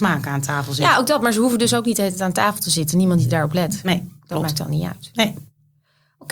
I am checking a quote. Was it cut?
no; 0 cuts

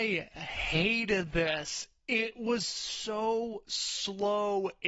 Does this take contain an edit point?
no; 0 cuts

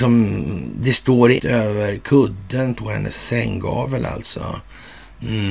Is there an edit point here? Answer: yes; 1 cut; at 1.4 s

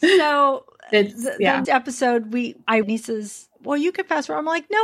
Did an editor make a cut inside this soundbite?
yes; 2 cuts; at 1.6 s, 2.8 s

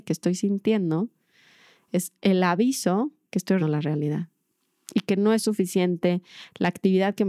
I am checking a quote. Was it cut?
yes; 1 cut; at 3.6 s

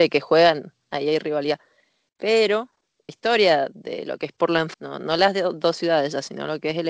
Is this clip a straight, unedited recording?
no; 2 cuts; at 3.1 s, 4.7 s

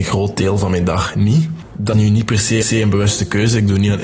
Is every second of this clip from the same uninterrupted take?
no; 2 cuts; at 1.9 s, 2.6 s

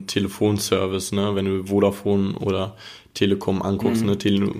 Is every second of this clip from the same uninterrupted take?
yes; 0 cuts

